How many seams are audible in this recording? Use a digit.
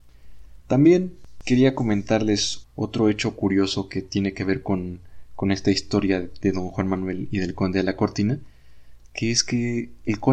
0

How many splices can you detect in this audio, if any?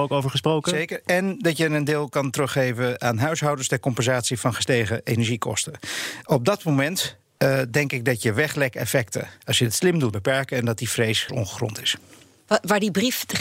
3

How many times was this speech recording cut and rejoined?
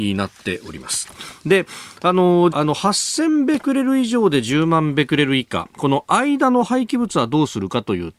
1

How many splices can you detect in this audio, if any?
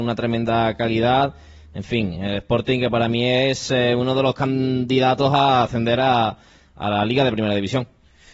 0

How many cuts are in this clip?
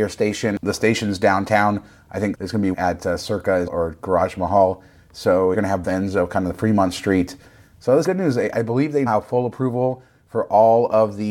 7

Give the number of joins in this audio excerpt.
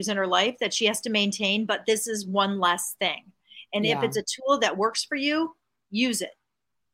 0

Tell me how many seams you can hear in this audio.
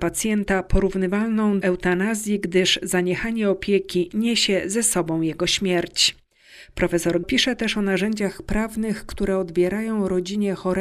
2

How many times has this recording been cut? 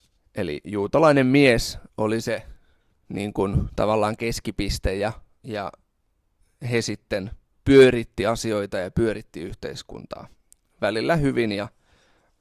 2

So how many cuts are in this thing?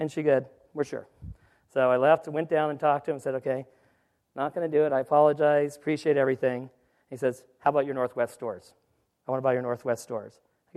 0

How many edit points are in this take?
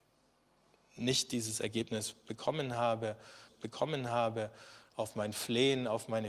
1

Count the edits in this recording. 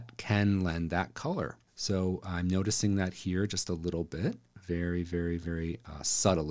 1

